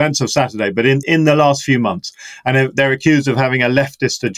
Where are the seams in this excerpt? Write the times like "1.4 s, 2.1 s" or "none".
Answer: 1.0 s